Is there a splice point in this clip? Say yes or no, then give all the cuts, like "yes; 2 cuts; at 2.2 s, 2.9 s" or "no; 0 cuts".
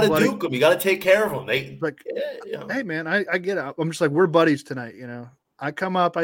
no; 0 cuts